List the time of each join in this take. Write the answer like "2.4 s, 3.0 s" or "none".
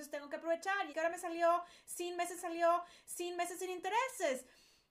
0.9 s, 2.4 s